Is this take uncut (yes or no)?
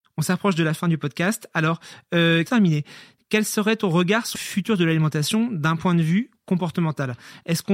no